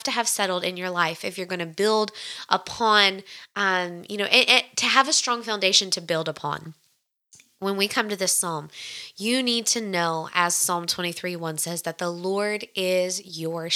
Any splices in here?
no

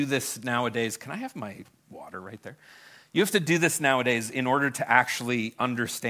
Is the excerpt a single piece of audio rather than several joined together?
yes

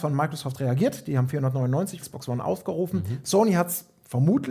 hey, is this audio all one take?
no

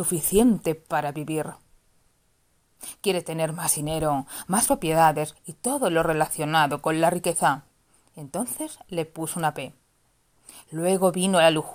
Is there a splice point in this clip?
no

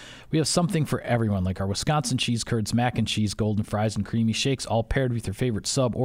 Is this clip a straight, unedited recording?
yes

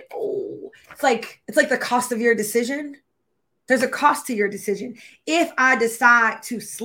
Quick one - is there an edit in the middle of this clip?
yes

